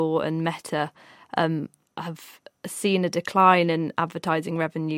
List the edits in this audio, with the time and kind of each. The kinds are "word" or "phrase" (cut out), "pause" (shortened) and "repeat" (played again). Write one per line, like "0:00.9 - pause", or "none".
none